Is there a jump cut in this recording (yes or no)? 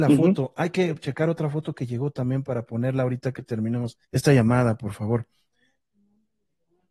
yes